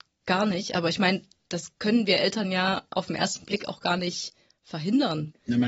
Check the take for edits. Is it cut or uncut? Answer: uncut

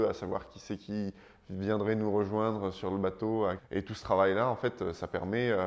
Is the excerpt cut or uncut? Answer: cut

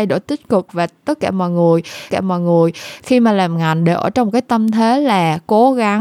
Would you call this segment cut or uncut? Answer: cut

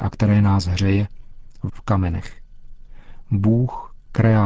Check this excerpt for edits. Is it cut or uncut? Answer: cut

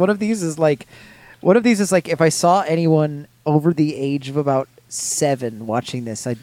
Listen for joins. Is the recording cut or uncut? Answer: uncut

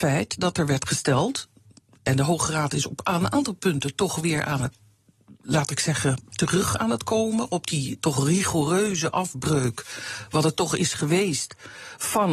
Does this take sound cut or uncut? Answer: uncut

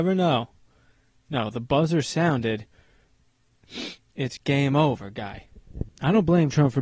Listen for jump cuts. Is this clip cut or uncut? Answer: cut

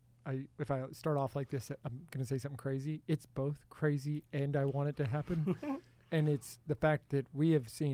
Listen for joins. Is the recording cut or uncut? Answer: cut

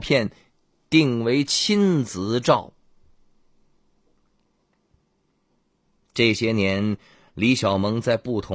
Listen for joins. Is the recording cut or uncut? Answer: uncut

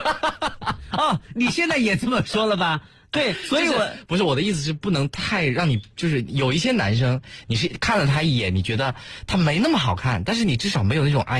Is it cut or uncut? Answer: uncut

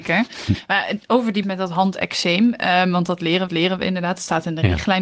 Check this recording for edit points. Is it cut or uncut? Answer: cut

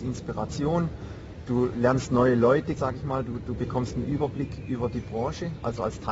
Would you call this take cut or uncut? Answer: cut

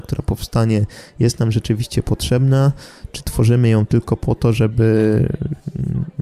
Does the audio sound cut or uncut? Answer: uncut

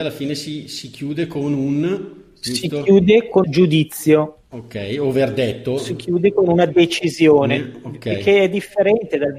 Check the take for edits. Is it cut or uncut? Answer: cut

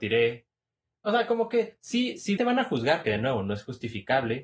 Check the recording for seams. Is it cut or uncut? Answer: cut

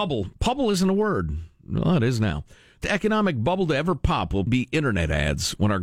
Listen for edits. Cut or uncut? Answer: cut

